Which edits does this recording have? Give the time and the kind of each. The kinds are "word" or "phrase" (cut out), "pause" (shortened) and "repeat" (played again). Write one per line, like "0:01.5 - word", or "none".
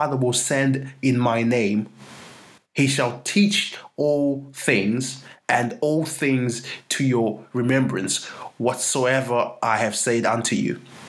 none